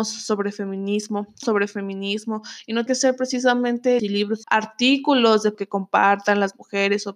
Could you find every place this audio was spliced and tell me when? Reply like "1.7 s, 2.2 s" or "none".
1.4 s, 2.9 s, 4.0 s, 4.4 s, 5.5 s